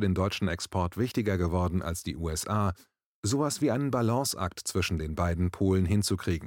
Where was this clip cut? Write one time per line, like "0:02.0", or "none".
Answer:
none